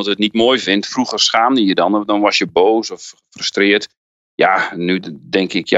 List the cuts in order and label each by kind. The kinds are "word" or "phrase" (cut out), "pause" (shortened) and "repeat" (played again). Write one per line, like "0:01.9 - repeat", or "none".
none